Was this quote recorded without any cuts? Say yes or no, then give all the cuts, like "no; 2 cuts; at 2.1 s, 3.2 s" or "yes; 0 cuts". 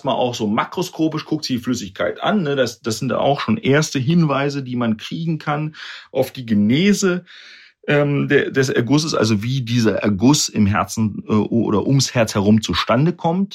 yes; 0 cuts